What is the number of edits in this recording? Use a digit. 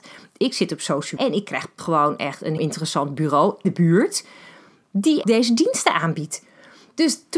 5